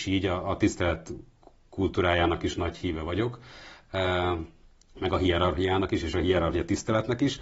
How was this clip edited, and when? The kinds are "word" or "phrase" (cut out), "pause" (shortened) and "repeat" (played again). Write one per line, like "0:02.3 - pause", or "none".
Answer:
none